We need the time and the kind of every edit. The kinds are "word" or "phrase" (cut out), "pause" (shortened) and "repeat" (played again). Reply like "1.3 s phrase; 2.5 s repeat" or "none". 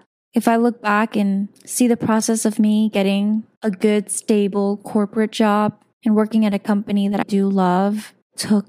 7.2 s word